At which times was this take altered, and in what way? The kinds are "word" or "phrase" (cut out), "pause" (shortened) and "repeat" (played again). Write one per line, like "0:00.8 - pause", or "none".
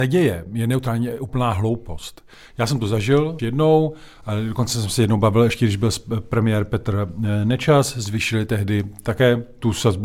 0:03.4 - word